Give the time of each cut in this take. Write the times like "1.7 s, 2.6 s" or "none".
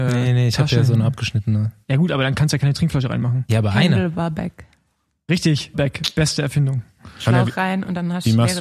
1.8 s, 5.7 s